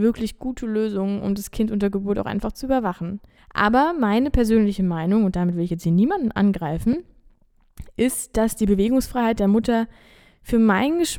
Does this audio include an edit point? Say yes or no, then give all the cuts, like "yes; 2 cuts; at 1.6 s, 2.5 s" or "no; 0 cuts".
yes; 1 cut; at 3.4 s